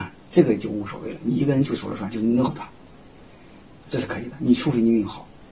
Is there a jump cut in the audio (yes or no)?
yes